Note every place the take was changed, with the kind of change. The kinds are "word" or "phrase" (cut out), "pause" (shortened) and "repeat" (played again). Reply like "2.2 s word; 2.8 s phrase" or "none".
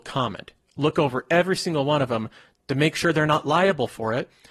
none